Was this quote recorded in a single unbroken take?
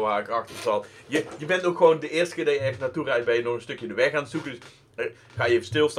yes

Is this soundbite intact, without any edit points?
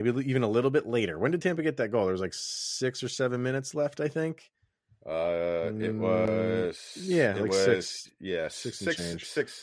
yes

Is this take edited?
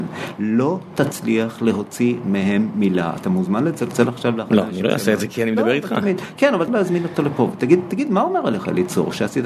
yes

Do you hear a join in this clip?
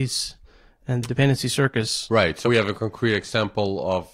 yes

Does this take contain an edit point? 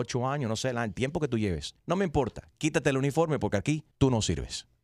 yes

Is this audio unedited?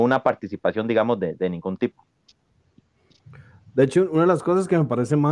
yes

